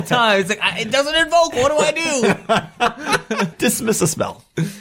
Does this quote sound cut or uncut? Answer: cut